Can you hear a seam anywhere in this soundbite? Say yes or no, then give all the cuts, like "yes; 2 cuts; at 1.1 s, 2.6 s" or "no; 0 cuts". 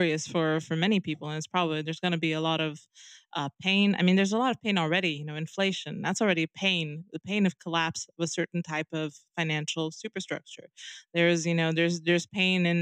no; 0 cuts